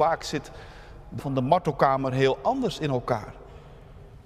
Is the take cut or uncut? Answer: cut